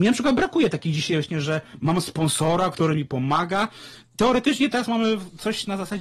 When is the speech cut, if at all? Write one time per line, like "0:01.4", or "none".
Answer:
none